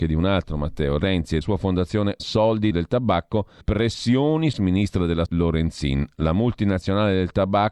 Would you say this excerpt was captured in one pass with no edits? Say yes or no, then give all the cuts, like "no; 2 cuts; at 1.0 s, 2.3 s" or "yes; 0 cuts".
no; 6 cuts; at 1.4 s, 2.2 s, 2.7 s, 3.6 s, 4.5 s, 5.3 s